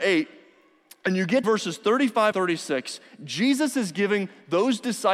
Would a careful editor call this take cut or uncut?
cut